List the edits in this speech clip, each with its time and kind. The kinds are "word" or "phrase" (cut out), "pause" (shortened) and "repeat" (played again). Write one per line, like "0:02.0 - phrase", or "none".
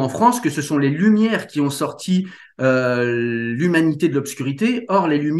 none